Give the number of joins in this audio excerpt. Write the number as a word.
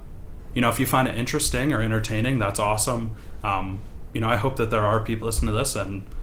one